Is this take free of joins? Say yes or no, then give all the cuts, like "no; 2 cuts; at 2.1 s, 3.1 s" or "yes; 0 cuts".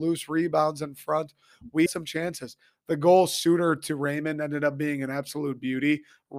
no; 1 cut; at 1.9 s